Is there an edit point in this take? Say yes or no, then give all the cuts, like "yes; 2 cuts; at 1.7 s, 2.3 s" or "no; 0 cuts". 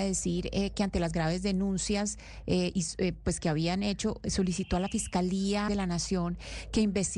yes; 1 cut; at 5.7 s